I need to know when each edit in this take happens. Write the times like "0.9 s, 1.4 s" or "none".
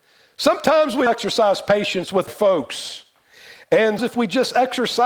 1.1 s, 2.3 s, 4.0 s